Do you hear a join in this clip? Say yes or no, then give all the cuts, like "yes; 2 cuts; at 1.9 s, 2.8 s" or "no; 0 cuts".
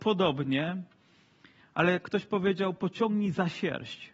no; 0 cuts